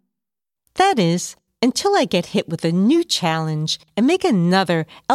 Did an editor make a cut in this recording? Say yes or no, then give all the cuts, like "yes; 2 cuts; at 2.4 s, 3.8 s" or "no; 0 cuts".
no; 0 cuts